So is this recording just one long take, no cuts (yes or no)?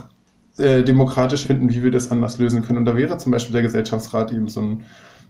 no